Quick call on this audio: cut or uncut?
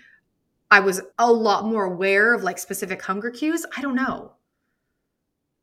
cut